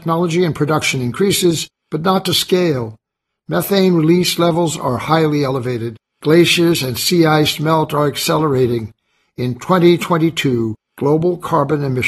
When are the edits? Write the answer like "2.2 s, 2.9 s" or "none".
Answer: none